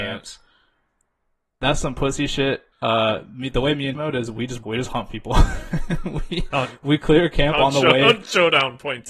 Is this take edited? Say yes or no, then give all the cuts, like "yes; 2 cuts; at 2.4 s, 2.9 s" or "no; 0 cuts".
yes; 3 cuts; at 2.7 s, 3.9 s, 4.6 s